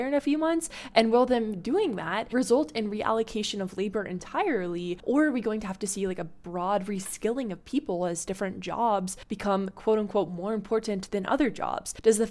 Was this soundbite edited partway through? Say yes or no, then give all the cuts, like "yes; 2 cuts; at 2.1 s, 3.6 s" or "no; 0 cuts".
no; 0 cuts